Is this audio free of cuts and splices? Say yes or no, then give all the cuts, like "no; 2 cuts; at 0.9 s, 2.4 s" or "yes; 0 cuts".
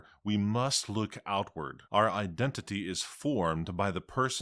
no; 1 cut; at 1.9 s